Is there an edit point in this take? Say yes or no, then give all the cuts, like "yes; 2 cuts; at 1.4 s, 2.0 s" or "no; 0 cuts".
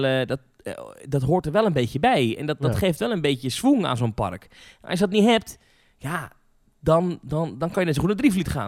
no; 0 cuts